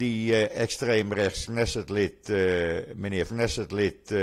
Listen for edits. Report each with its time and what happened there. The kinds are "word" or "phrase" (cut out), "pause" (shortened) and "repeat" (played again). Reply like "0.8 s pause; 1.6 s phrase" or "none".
3.3 s repeat